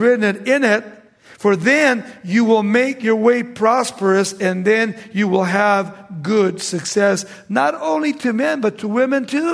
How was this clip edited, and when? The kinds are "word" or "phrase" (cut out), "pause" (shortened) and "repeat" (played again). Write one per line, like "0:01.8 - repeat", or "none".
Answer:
none